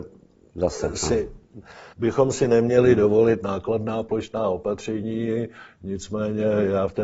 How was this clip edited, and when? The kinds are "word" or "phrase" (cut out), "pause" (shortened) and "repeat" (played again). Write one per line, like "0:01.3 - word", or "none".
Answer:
0:01.9 - pause